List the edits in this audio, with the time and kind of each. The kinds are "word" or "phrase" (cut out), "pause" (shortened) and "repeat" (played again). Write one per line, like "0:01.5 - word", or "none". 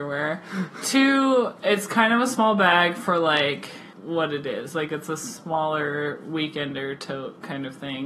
0:03.9 - word